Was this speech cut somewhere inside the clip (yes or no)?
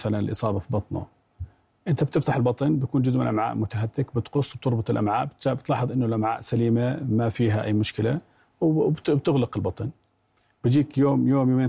no